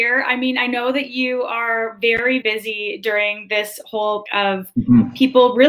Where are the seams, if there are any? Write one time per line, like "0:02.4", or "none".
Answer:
0:02.4
0:04.3

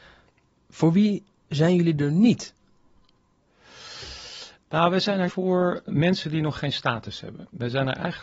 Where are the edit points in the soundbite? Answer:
0:05.3
0:05.9

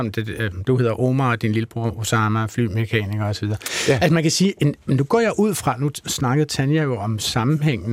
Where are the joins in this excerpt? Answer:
none

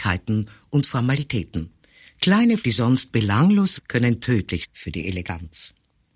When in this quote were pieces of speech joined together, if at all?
0:02.6
0:03.8
0:04.6

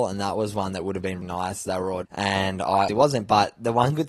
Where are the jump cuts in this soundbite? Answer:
0:01.2
0:02.0
0:02.9

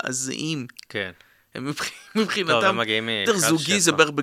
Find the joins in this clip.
0:03.3

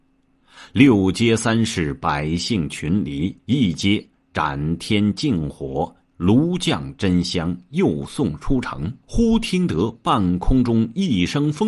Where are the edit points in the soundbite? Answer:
0:03.4
0:09.0

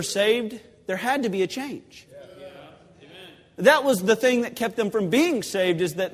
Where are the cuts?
none

